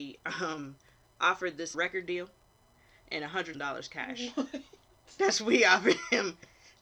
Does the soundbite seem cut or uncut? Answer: cut